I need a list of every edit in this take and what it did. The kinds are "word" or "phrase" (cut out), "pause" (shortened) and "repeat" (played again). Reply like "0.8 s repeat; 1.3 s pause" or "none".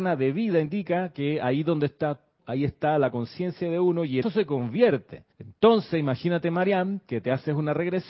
2.4 s word; 4.2 s phrase; 5.3 s pause